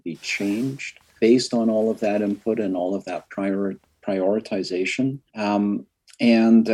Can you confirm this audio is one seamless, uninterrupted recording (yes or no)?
no